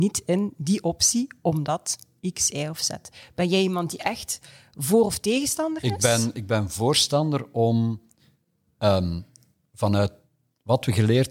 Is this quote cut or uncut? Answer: uncut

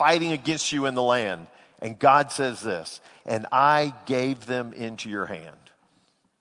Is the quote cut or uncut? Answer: uncut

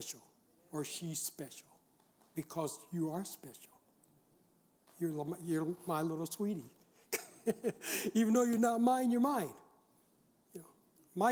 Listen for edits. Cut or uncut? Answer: uncut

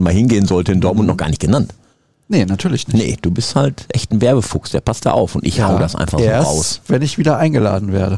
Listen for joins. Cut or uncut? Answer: uncut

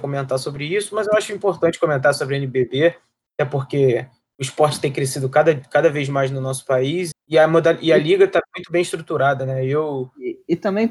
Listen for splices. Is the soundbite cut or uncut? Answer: cut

